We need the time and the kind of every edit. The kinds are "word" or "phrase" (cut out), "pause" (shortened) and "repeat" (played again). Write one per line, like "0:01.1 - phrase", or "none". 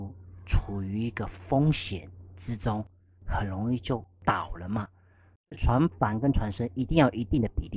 0:04.1 - pause